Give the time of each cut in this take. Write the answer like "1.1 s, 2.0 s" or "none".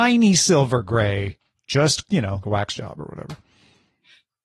2.0 s, 2.4 s